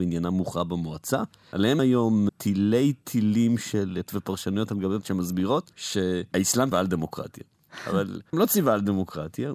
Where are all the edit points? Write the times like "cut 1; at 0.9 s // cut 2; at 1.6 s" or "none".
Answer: cut 1; at 1.8 s // cut 2; at 2.3 s // cut 3; at 4.1 s // cut 4; at 5.0 s // cut 5; at 6.7 s // cut 6; at 8.3 s